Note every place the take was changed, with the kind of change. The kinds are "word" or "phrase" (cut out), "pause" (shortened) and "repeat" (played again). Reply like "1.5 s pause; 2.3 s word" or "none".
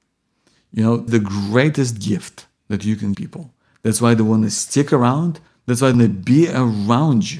1.1 s phrase; 3.1 s word; 5.5 s pause; 5.9 s word